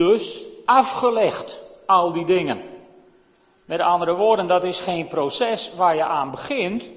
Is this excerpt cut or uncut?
uncut